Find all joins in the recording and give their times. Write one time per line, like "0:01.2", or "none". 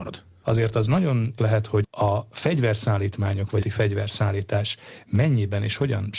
0:01.4
0:01.8
0:03.6

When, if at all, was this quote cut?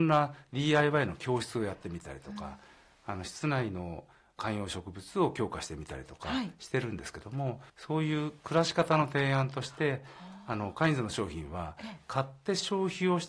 0:07.7

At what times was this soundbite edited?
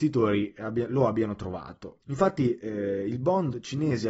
0:02.0

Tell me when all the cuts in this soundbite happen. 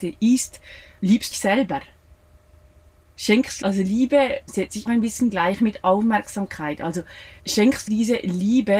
0:01.0
0:01.3
0:03.6
0:04.5
0:04.9
0:07.4
0:07.9

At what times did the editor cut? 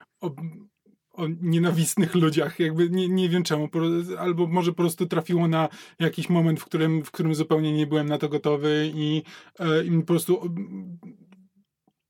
none

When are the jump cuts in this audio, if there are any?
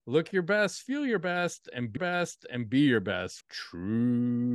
0:02.0
0:03.4

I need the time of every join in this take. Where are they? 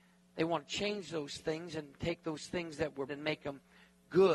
0:03.1

